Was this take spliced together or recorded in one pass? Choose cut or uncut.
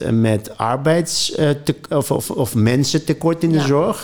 uncut